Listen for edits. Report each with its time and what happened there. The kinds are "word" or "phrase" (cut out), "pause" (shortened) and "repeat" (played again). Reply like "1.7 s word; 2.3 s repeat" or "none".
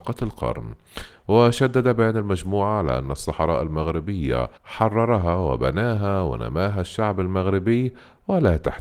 4.6 s pause